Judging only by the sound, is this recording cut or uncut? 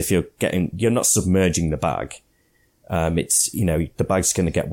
uncut